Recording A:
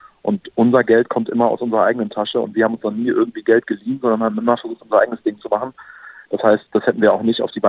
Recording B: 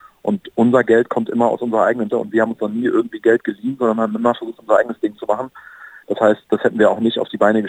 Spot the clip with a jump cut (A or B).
B